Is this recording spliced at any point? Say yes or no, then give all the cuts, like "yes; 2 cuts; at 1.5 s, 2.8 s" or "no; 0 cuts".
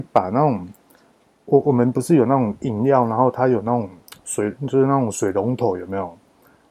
no; 0 cuts